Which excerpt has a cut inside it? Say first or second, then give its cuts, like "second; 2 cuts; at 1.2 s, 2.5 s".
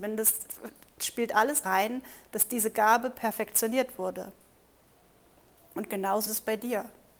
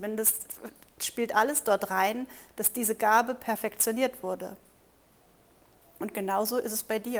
first; 2 cuts; at 1.6 s, 6.3 s